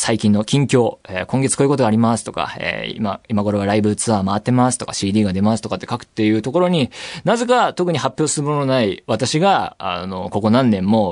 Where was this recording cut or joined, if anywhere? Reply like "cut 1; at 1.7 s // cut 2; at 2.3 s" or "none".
none